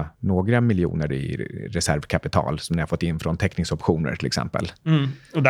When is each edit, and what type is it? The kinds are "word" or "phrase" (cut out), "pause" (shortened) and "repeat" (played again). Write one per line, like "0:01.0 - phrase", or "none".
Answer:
0:01.1 - word

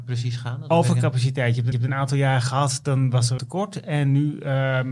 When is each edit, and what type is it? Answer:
0:01.7 - repeat
0:03.4 - word

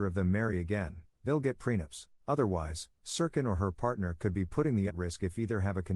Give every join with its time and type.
0:02.2 - pause
0:04.9 - word

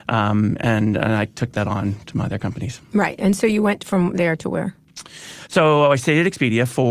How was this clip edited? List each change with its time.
none

